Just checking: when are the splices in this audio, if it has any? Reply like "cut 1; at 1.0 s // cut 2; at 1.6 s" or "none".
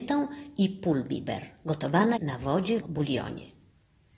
cut 1; at 2.2 s // cut 2; at 2.8 s